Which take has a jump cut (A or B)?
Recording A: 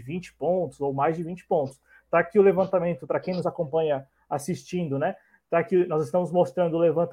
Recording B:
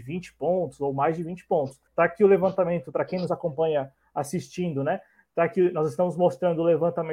B